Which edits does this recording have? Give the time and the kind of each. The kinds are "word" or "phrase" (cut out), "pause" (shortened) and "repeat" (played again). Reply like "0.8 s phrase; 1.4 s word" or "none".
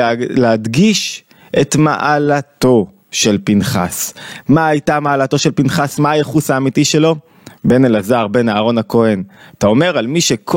none